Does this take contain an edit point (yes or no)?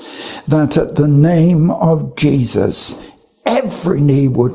no